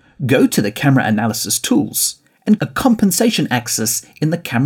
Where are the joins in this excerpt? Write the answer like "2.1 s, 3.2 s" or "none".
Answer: 2.6 s